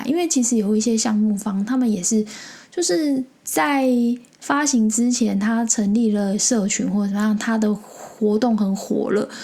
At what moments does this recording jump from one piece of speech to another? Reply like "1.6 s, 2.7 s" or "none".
3.4 s